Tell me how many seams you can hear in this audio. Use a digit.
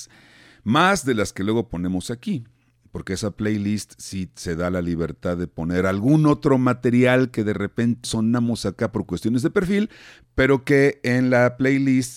1